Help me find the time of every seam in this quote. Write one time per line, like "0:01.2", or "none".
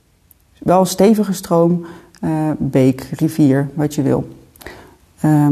none